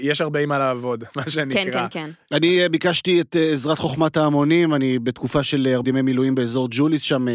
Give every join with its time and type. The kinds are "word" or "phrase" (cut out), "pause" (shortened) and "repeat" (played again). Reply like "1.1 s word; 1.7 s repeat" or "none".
5.8 s word